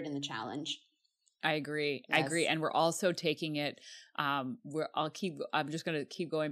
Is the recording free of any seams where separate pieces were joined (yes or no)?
yes